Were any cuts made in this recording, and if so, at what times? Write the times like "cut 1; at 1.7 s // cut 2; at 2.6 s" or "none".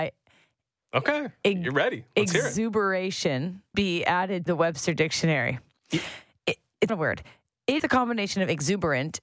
cut 1; at 3.7 s // cut 2; at 4.5 s // cut 3; at 6.9 s // cut 4; at 7.8 s